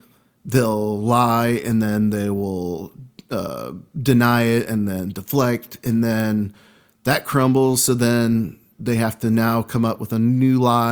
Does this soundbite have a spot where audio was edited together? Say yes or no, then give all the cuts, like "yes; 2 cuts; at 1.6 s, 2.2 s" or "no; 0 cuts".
no; 0 cuts